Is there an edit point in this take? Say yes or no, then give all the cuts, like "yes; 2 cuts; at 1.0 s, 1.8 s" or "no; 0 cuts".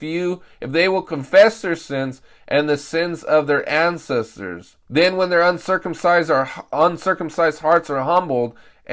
yes; 1 cut; at 4.8 s